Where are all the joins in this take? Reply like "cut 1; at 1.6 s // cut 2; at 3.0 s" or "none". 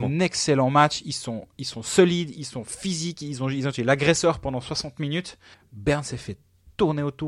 cut 1; at 5.5 s